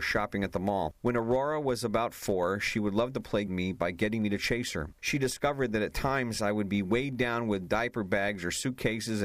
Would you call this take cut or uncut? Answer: cut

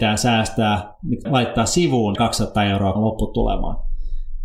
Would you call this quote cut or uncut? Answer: cut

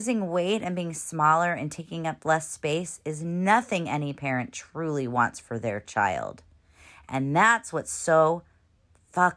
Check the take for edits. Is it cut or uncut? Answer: uncut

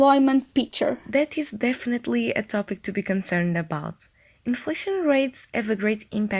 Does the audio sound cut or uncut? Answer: uncut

